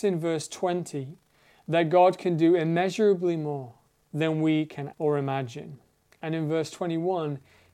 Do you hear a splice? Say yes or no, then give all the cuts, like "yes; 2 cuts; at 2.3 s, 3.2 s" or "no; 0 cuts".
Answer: yes; 1 cut; at 4.9 s